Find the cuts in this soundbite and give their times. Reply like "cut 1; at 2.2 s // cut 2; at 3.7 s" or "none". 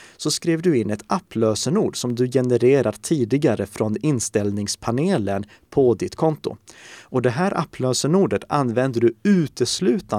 none